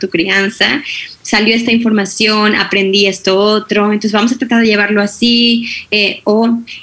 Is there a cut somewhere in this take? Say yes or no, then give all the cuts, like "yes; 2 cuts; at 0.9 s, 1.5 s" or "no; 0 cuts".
no; 0 cuts